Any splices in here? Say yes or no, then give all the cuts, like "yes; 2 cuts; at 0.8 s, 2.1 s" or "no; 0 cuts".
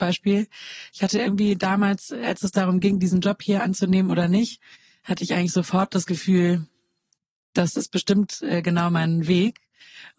no; 0 cuts